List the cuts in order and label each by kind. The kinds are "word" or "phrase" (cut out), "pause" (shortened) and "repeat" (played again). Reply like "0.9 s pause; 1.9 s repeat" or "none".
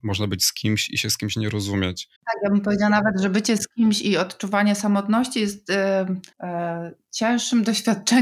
2.2 s pause; 6.3 s pause